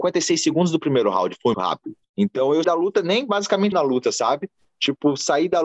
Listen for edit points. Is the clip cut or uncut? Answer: cut